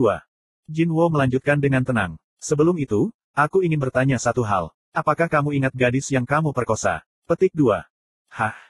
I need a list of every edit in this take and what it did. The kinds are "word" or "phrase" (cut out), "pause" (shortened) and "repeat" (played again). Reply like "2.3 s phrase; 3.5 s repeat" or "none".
2.3 s pause